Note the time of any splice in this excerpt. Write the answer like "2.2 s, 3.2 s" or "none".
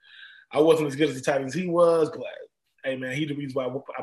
none